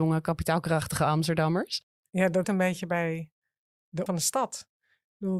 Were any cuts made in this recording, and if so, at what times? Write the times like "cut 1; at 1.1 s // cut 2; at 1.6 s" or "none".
cut 1; at 2.4 s // cut 2; at 4.1 s